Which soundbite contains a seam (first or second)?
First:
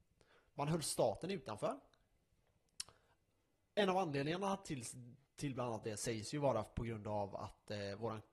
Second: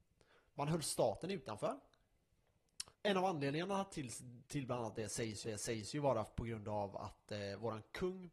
second